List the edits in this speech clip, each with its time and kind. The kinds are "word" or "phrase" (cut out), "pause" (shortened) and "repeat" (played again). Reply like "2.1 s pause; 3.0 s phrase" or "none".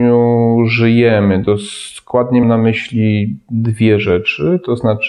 2.4 s word